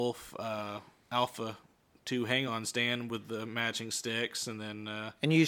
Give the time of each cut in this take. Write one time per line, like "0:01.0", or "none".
none